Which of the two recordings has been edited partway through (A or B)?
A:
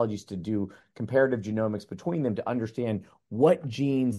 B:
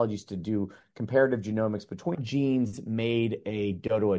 B